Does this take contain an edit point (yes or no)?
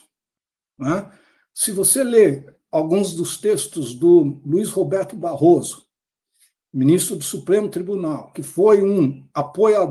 no